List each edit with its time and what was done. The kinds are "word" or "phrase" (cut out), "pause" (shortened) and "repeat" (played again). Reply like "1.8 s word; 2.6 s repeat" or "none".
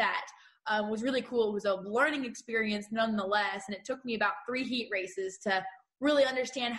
none